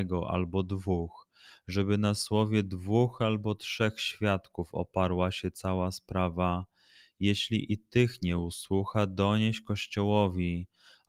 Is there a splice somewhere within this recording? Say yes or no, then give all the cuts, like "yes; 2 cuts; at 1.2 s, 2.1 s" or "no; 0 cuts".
no; 0 cuts